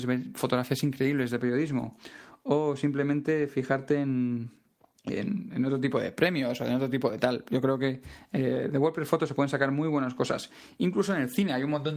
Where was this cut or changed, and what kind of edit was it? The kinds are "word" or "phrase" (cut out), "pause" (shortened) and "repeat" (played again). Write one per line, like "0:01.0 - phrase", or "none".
0:04.7 - pause